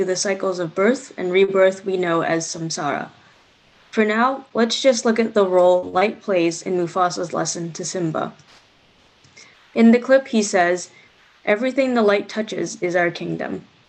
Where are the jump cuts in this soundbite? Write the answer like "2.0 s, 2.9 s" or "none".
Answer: none

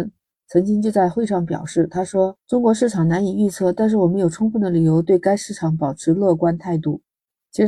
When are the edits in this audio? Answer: 2.4 s

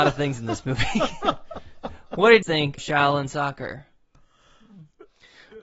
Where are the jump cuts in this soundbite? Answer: 2.4 s, 2.8 s

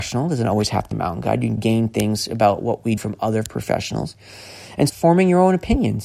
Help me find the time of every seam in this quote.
0.9 s, 1.6 s, 3.0 s, 4.9 s

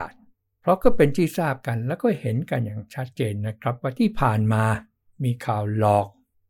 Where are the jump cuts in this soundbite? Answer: none

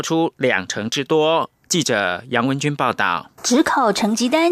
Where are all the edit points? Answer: 3.4 s

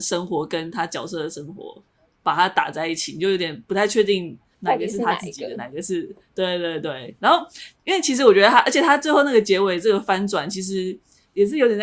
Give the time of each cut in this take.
none

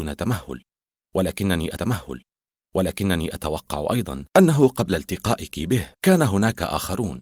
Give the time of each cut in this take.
1.8 s, 4.3 s, 5.9 s

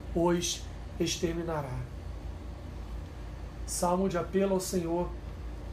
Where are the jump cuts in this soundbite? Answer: none

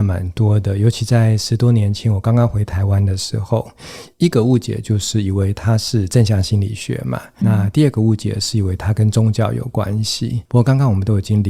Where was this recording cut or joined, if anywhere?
7.4 s, 10.5 s

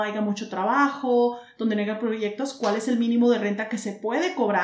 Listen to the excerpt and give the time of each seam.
none

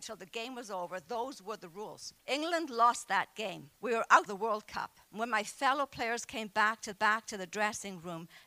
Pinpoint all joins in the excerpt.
2.2 s, 3.8 s, 4.3 s, 5.1 s, 6.9 s

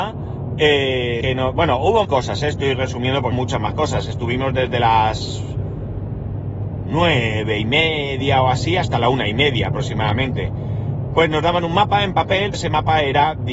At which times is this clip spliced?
1.2 s, 2.0 s, 3.3 s, 12.5 s

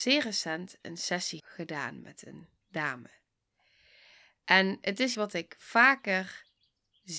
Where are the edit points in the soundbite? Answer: 1.4 s, 5.1 s

